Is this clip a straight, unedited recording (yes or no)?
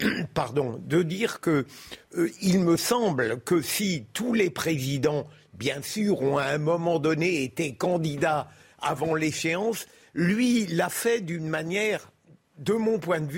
yes